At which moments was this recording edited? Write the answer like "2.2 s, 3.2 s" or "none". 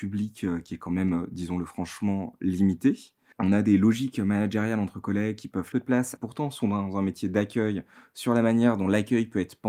5.7 s, 6.2 s